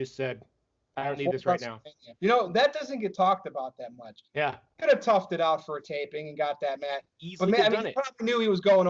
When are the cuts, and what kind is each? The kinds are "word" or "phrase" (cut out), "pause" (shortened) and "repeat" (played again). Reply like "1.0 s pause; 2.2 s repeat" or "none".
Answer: 2.2 s pause; 4.3 s pause